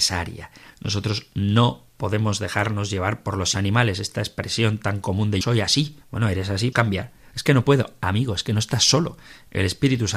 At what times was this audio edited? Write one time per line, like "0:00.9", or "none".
0:03.5
0:05.4
0:06.0
0:06.7